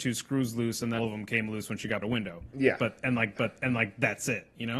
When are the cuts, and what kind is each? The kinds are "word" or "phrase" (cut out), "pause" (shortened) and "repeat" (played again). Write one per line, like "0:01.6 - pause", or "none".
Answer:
0:01.0 - word
0:02.0 - phrase
0:03.4 - repeat